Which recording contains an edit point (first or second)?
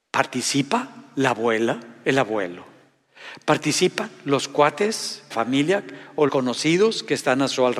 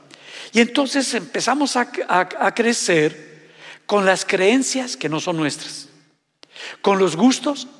first